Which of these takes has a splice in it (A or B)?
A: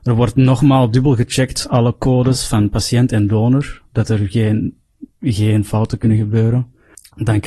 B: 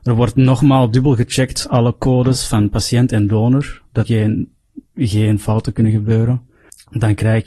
B